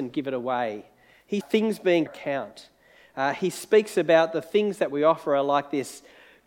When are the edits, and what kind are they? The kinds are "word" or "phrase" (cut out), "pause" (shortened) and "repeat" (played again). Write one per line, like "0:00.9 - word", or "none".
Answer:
0:01.4 - phrase
0:02.1 - phrase